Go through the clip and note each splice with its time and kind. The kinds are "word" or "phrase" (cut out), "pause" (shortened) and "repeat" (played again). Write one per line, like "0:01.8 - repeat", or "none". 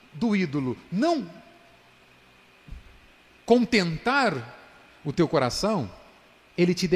none